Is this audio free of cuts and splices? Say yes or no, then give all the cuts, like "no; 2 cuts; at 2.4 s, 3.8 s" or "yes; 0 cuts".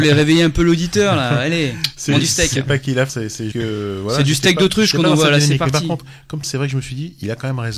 no; 4 cuts; at 2.2 s, 3.1 s, 3.5 s, 6.4 s